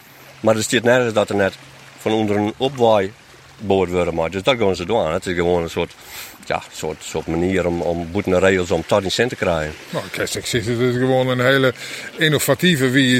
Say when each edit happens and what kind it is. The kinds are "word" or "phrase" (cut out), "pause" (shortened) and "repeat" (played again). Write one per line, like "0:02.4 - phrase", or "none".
none